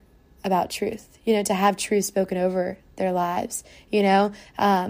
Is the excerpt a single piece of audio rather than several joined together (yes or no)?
yes